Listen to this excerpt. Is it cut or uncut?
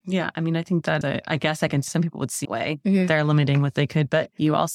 cut